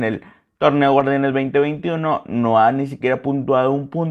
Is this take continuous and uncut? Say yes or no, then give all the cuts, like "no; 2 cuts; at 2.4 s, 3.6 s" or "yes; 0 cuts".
yes; 0 cuts